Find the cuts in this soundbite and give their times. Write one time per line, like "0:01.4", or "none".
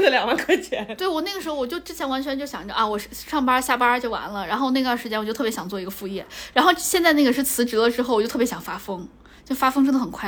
none